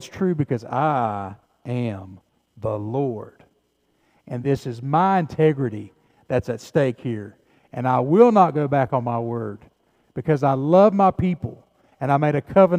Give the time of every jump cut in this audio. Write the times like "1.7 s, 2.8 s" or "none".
none